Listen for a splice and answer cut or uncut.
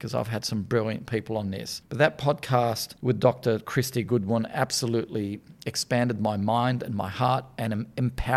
uncut